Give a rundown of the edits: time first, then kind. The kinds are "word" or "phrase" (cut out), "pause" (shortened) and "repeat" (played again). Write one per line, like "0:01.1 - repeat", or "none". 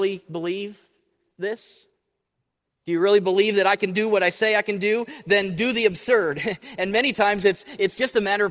none